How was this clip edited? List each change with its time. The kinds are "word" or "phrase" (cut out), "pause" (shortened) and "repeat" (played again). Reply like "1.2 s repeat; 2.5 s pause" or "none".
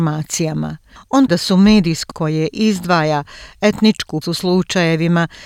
1.3 s word; 2.1 s word; 4.2 s word